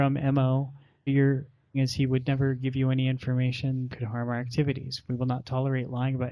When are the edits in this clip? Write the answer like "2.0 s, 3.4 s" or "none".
1.1 s, 1.7 s, 3.9 s